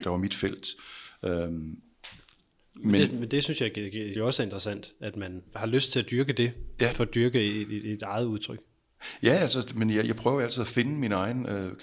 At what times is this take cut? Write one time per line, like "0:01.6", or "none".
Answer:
0:04.2
0:05.5
0:06.9
0:08.0